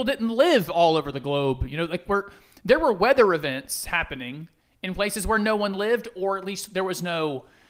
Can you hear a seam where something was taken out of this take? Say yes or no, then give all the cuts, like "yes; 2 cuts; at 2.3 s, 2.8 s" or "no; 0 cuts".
no; 0 cuts